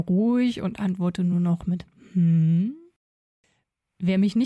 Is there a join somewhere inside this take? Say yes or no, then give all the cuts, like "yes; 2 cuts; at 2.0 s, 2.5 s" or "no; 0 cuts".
no; 0 cuts